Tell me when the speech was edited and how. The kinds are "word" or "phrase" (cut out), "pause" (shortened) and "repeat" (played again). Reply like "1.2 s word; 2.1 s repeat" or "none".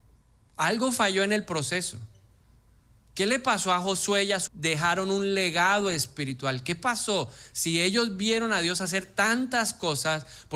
4.5 s phrase